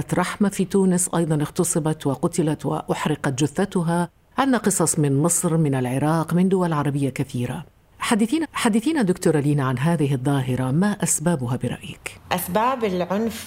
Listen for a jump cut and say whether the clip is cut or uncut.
cut